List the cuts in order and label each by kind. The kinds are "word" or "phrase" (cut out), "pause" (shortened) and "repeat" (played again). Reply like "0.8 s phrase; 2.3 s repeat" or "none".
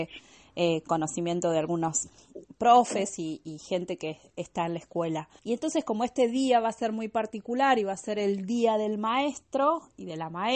none